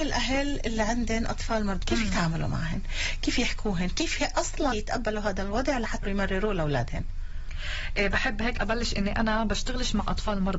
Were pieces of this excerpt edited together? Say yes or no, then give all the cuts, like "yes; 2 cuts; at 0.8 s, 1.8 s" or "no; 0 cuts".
yes; 4 cuts; at 1.8 s, 4.7 s, 6.0 s, 8.6 s